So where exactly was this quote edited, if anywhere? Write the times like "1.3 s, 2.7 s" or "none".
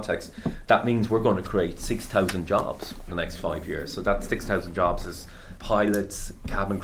3.1 s, 5.6 s